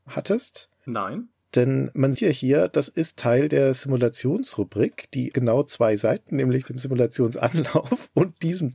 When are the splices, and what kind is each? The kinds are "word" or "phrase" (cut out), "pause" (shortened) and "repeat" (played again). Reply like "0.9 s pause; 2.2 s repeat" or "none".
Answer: 2.1 s word; 5.3 s word; 6.3 s word